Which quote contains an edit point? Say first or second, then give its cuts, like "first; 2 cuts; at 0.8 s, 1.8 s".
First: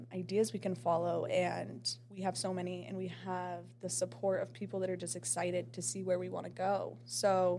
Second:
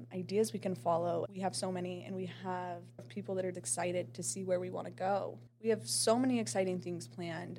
second; 4 cuts; at 1.3 s, 3.0 s, 3.5 s, 5.5 s